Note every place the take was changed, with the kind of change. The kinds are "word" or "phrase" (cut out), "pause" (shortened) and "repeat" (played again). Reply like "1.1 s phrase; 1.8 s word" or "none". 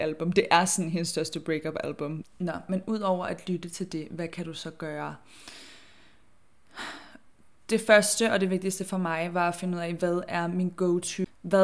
none

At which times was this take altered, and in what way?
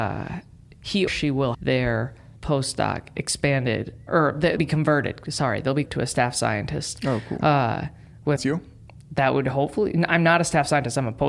1.1 s word; 1.5 s word; 2.4 s word; 4.1 s word; 4.6 s word; 5.9 s word; 8.4 s word

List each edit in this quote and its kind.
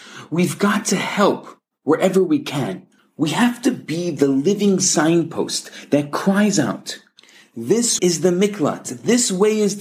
3.0 s pause; 8.0 s word

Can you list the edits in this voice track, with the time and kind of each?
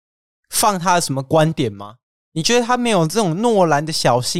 none

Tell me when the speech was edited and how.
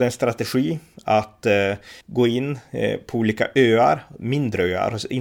2.0 s pause

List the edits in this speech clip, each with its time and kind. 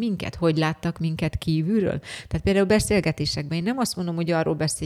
none

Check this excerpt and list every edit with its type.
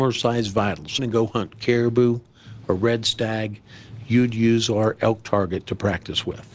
1.0 s phrase

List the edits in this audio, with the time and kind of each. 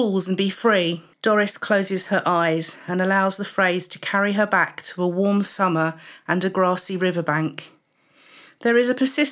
1.1 s pause

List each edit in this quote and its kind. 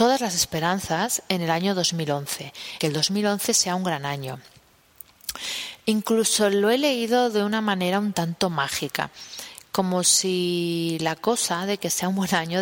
2.8 s word

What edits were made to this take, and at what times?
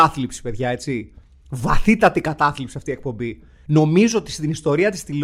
none

